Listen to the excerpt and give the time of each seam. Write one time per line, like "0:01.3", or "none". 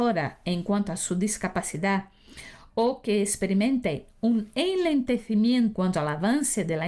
0:05.7

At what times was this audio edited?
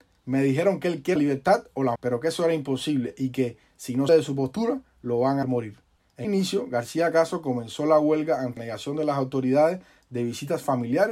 0:01.2
0:02.0
0:04.1
0:05.4
0:06.2
0:08.6

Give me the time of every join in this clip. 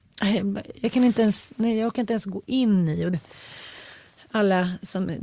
0:03.1

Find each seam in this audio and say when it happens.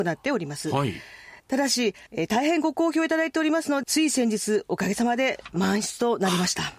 0:01.4
0:02.1
0:03.8

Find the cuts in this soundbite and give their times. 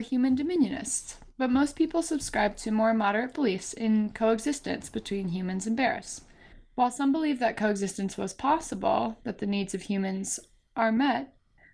none

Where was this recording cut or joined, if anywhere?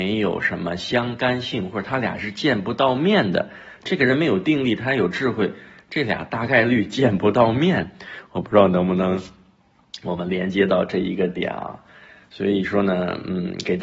none

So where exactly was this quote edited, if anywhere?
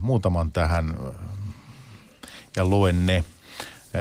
none

